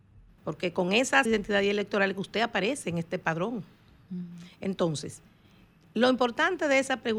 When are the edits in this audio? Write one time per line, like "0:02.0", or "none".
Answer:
0:01.3